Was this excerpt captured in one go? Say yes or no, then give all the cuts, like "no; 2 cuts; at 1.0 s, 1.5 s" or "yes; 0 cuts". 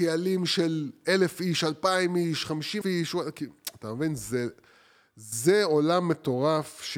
no; 1 cut; at 2.8 s